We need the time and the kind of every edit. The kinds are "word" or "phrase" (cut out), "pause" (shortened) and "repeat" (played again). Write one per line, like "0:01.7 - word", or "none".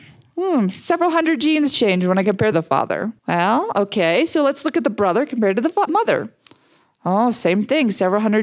0:02.5 - phrase
0:03.2 - pause
0:05.9 - word